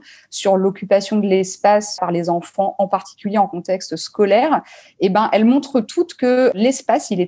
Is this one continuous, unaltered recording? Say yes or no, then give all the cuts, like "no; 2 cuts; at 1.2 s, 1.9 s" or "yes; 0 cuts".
yes; 0 cuts